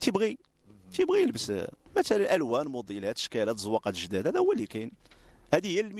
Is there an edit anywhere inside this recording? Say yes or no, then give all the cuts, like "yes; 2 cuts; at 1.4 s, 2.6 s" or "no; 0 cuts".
no; 0 cuts